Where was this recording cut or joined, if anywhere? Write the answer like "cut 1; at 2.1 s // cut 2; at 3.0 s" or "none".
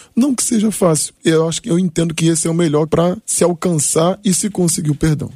cut 1; at 1.2 s // cut 2; at 2.9 s // cut 3; at 3.2 s